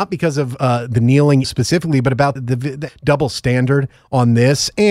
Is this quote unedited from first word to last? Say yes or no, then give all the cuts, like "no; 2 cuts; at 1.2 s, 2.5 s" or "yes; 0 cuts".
no; 3 cuts; at 1.4 s, 2.4 s, 2.9 s